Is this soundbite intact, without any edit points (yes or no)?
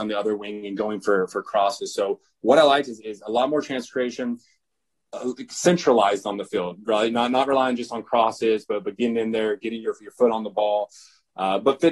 yes